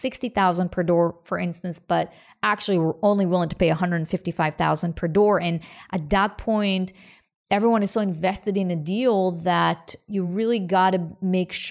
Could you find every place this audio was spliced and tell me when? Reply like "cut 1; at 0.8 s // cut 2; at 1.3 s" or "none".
none